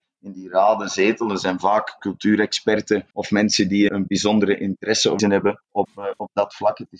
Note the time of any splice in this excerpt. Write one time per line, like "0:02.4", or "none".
0:03.1
0:03.9
0:05.2
0:05.6